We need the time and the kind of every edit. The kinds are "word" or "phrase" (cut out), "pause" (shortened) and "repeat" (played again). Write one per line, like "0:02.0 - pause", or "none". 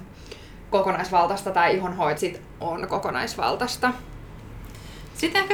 0:02.2 - phrase
0:02.5 - word